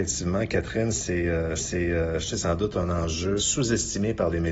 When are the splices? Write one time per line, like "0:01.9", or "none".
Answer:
0:01.6
0:02.3
0:03.4